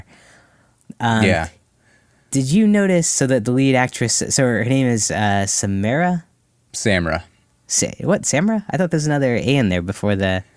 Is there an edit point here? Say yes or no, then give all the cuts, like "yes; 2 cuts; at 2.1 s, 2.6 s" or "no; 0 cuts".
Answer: no; 0 cuts